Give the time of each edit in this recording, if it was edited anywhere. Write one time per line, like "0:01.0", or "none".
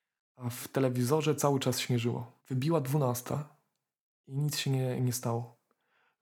0:02.4

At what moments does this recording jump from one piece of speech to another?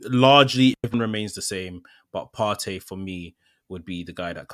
none

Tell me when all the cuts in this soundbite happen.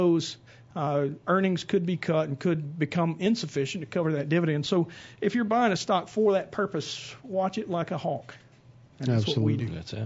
none

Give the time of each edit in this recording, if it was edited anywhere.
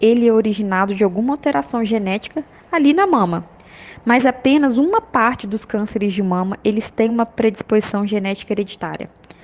none

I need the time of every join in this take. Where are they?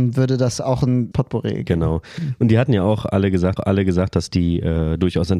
0:01.1
0:03.6

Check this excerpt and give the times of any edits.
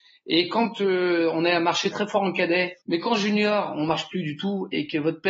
0:01.9
0:02.8

